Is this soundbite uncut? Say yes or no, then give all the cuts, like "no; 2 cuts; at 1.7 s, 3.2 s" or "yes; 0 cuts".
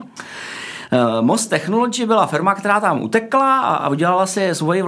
yes; 0 cuts